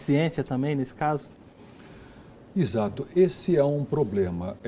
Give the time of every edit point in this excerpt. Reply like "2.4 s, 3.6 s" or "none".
none

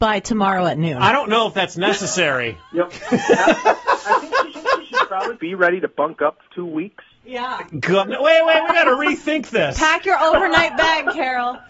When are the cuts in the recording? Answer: 4.5 s, 5.4 s, 6.5 s, 8.0 s

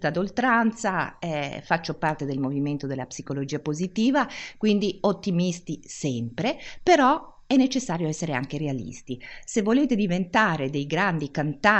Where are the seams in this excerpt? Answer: none

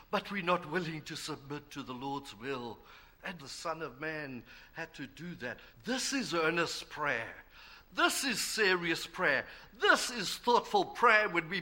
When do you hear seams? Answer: 3.4 s, 5.7 s

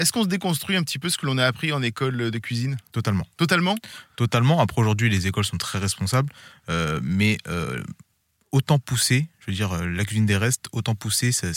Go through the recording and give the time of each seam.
none

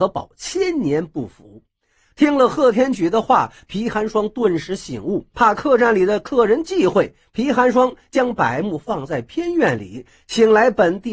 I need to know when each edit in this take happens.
5.3 s

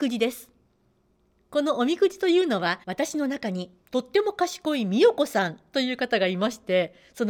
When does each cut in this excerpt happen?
2.8 s

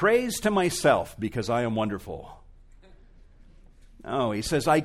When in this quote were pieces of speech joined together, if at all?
none

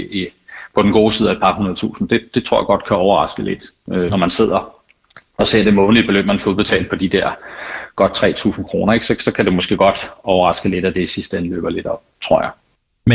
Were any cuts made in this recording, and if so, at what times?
none

